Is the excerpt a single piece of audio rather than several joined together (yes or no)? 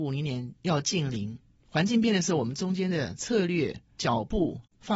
yes